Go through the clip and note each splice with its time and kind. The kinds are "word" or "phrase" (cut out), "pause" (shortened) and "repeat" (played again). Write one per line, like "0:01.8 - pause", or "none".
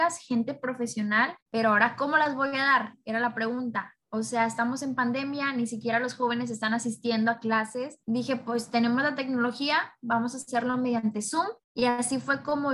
0:01.4 - pause
0:04.0 - pause
0:08.0 - pause
0:11.6 - pause